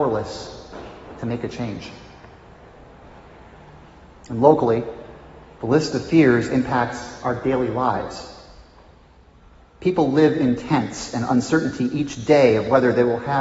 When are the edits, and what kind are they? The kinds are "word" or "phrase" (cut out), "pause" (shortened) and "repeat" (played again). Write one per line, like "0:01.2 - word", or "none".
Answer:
none